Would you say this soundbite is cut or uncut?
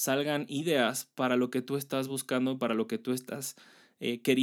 uncut